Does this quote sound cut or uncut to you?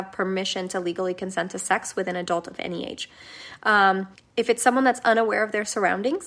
cut